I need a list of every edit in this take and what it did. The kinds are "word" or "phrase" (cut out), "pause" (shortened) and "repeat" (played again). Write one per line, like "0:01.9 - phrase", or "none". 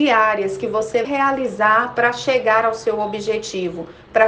0:01.0 - word